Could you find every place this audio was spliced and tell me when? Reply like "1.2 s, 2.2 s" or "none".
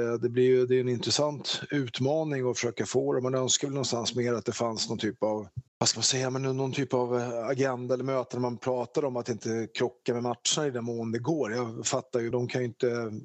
5.7 s, 12.3 s